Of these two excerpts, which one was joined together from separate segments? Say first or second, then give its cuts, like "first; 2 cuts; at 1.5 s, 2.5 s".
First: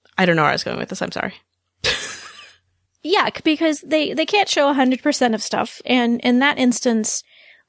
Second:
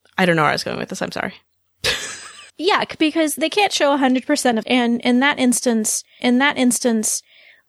second; 4 cuts; at 2.5 s, 3.4 s, 4.6 s, 6.2 s